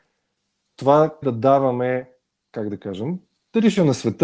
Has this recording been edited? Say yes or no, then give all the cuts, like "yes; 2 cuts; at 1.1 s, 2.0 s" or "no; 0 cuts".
yes; 2 cuts; at 1.2 s, 2.4 s